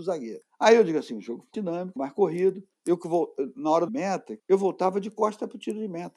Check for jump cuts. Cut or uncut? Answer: cut